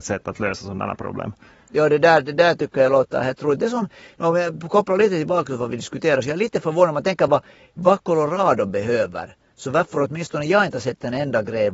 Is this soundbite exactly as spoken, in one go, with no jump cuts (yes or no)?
yes